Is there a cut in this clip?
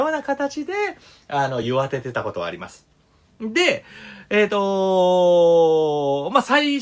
no; 0 cuts

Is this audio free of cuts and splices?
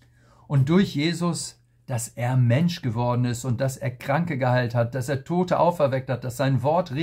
yes; 0 cuts

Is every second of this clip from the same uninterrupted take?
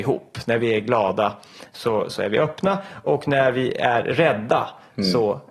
yes; 0 cuts

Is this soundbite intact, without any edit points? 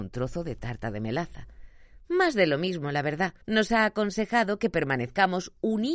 no; 1 cut; at 3.4 s

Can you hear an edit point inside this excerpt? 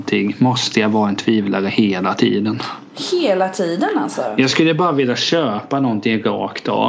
no; 0 cuts

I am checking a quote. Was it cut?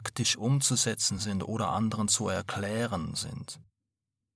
no; 0 cuts

